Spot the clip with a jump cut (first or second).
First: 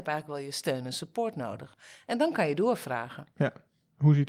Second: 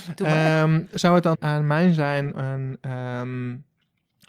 second